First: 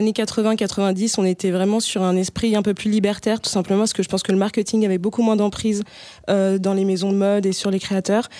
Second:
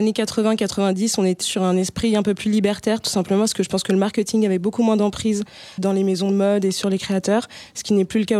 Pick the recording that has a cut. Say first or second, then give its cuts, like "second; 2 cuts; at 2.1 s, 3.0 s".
second; 2 cuts; at 1.4 s, 5.8 s